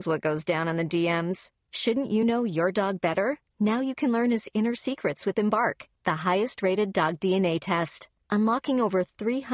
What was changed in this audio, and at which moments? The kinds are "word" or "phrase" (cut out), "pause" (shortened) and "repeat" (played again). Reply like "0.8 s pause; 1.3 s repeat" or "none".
none